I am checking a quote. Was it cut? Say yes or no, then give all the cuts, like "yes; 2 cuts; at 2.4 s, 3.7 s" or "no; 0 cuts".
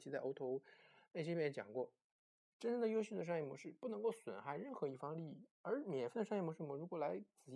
no; 0 cuts